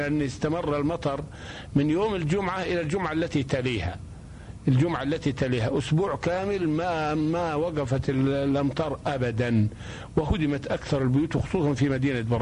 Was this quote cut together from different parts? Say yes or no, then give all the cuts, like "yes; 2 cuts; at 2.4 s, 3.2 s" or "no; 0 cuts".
no; 0 cuts